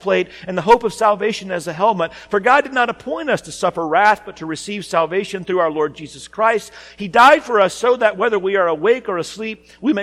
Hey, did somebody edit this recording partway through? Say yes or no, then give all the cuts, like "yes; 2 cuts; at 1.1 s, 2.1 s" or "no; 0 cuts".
no; 0 cuts